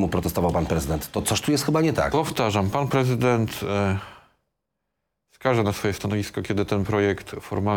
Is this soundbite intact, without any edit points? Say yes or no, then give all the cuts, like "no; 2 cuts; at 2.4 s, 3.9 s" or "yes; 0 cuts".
yes; 0 cuts